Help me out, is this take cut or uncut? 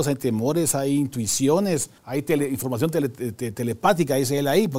cut